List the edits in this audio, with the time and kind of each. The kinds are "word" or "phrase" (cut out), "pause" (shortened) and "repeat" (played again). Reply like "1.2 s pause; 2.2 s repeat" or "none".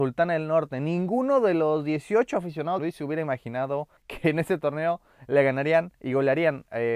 2.8 s phrase; 4.0 s pause